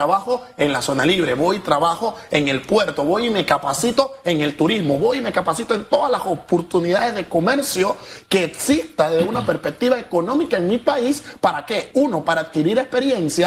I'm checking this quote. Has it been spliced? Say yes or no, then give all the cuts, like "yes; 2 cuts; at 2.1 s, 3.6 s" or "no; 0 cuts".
no; 0 cuts